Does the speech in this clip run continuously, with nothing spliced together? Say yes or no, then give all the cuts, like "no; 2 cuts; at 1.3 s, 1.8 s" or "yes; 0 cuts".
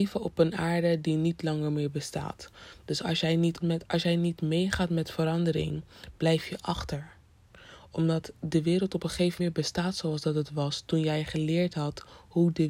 no; 2 cuts; at 3.6 s, 9.4 s